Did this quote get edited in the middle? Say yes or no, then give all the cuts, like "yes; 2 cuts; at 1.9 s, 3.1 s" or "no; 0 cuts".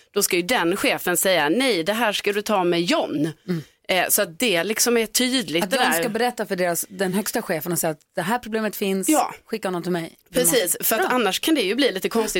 no; 0 cuts